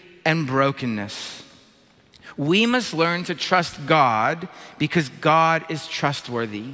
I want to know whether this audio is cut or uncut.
uncut